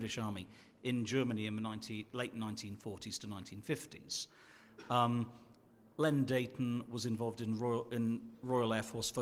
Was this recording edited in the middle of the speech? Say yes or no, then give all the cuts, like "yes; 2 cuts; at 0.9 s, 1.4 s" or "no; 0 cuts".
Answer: no; 0 cuts